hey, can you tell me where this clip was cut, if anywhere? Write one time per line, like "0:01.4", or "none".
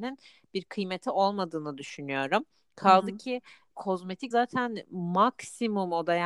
0:03.7
0:04.3

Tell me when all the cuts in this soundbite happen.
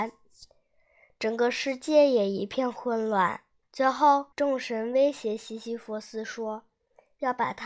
0:03.6
0:04.3

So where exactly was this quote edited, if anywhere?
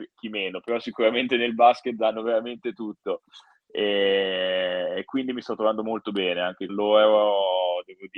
0:06.7

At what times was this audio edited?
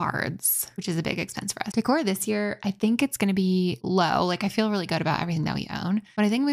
0:01.7

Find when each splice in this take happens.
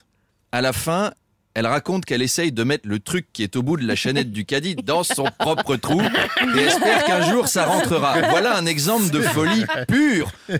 none

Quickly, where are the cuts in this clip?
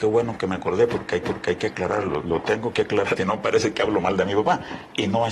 0:01.2
0:03.2

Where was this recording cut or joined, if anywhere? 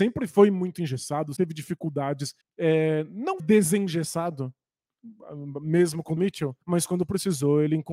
0:01.4
0:02.4
0:03.4
0:06.2
0:06.6

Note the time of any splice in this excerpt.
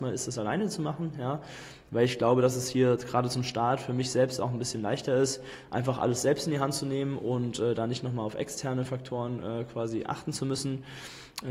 none

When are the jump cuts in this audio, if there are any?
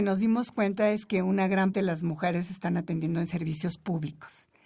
0:01.7

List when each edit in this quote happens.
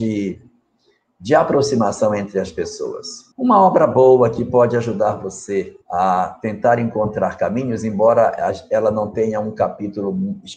0:03.3
0:05.8

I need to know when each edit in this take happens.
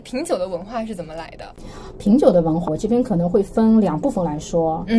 0:02.7

